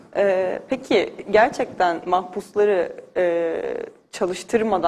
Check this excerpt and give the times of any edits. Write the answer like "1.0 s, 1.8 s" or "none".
none